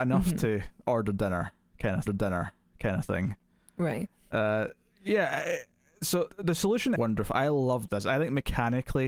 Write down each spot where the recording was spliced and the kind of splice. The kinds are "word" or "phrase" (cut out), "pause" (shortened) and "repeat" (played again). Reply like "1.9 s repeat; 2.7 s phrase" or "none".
2.1 s repeat; 6.3 s word; 7.0 s phrase